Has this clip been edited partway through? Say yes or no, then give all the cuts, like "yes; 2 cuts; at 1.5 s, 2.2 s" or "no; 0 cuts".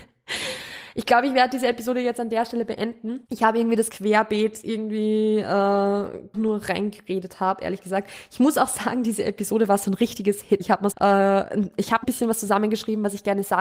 yes; 6 cuts; at 3.3 s, 3.9 s, 6.3 s, 10.6 s, 10.9 s, 12.0 s